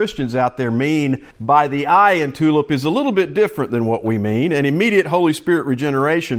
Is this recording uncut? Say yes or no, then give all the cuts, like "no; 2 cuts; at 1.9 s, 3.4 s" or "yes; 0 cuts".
no; 1 cut; at 1.3 s